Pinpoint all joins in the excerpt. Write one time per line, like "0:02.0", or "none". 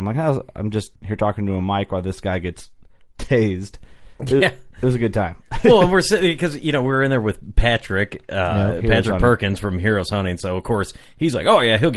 0:01.0